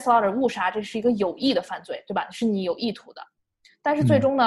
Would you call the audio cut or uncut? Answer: uncut